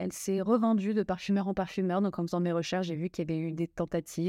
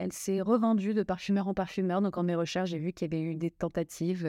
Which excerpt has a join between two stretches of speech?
second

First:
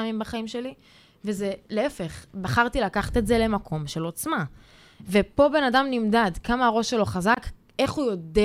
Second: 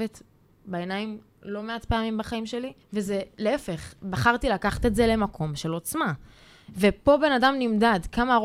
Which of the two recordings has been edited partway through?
second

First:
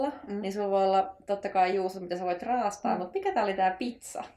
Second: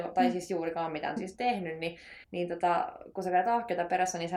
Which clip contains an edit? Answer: second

